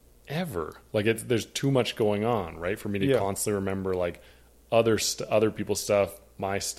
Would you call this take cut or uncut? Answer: uncut